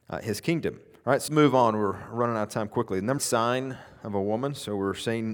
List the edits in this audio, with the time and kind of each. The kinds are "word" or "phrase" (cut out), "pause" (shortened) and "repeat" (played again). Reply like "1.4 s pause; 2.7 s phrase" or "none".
1.3 s word; 3.2 s phrase